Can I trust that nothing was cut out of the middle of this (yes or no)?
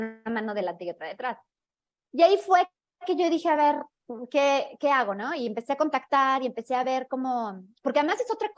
yes